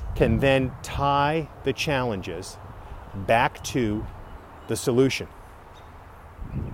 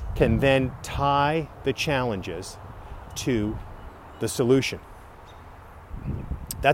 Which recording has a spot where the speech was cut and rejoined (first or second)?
second